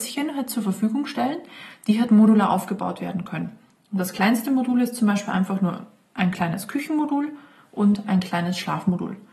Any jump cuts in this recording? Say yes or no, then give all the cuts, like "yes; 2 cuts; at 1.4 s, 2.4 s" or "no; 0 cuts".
no; 0 cuts